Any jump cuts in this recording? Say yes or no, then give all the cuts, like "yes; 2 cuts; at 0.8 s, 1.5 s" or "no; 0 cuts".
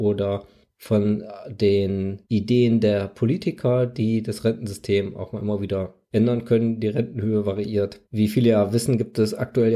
yes; 3 cuts; at 2.3 s, 6.0 s, 8.1 s